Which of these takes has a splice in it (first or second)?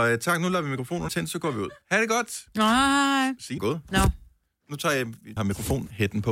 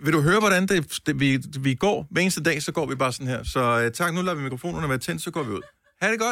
first